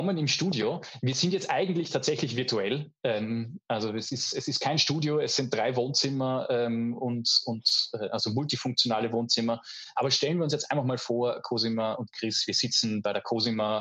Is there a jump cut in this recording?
no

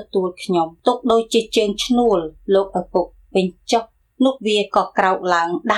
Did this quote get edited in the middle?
no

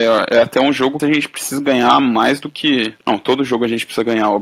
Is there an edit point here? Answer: yes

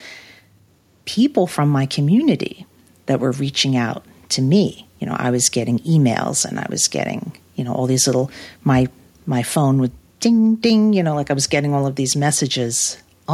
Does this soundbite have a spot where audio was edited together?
no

